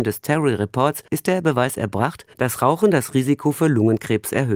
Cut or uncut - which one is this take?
cut